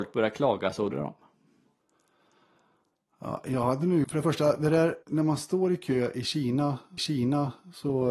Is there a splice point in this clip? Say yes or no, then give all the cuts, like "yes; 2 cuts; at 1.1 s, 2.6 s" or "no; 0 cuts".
yes; 4 cuts; at 0.9 s, 4.0 s, 5.0 s, 7.0 s